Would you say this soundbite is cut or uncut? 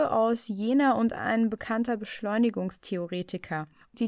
uncut